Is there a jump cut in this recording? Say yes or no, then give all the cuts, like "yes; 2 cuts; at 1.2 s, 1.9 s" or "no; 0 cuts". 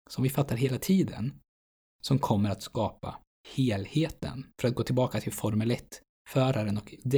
yes; 2 cuts; at 4.5 s, 5.3 s